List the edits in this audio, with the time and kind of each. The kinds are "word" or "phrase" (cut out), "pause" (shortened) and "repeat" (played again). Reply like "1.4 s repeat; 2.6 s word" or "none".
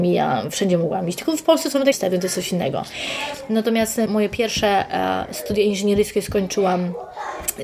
1.9 s word; 4.1 s word